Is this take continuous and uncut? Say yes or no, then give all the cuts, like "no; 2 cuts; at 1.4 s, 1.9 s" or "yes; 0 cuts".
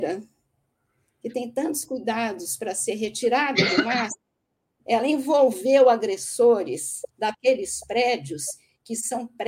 no; 1 cut; at 7.1 s